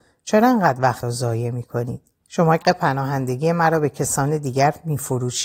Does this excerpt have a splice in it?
yes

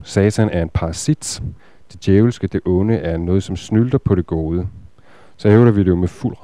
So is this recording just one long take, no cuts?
yes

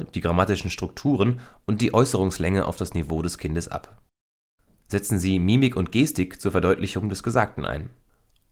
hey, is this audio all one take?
yes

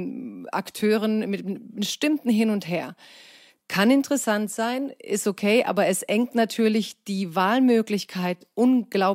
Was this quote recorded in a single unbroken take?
yes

